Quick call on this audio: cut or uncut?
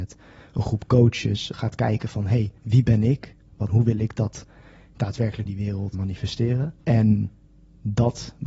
cut